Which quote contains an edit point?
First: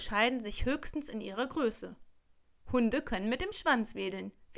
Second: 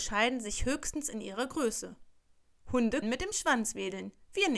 second; 1 cut; at 3.0 s

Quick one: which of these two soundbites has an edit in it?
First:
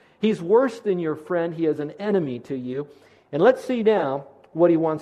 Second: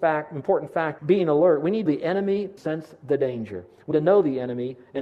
second; 4 cuts; at 1.0 s, 1.9 s, 2.6 s, 3.9 s

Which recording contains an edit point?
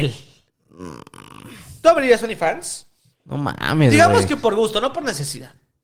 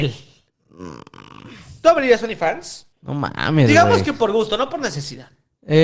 second; 1 cut; at 2.9 s

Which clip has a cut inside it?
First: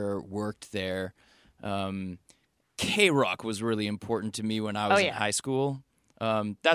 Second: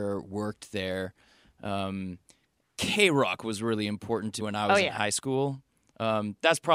second; 1 cut; at 4.4 s

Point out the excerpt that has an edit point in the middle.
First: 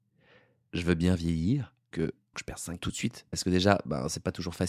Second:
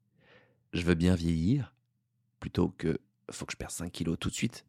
first; 3 cuts; at 1.9 s, 2.3 s, 2.8 s

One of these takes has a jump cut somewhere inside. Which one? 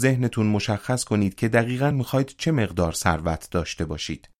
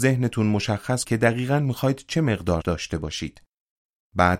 second; 2 cuts; at 1.0 s, 2.6 s

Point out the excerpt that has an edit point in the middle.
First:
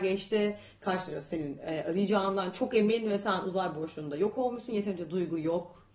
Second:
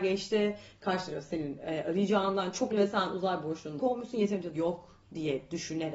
second; 3 cuts; at 2.7 s, 3.8 s, 4.5 s

